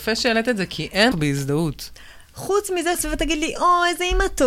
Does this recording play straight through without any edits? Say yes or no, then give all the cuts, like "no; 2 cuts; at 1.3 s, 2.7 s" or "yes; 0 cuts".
no; 2 cuts; at 1.1 s, 2.9 s